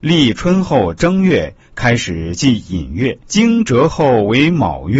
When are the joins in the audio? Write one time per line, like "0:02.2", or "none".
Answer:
0:03.2